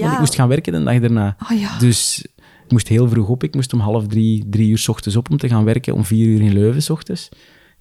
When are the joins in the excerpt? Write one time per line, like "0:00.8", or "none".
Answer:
none